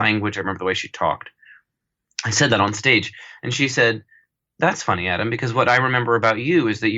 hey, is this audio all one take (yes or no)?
yes